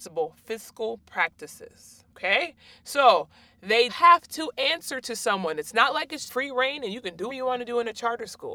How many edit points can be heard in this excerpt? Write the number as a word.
four